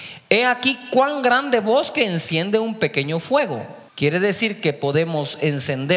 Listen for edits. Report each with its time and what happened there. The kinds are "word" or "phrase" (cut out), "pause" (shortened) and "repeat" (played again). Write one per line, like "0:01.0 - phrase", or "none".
0:03.9 - pause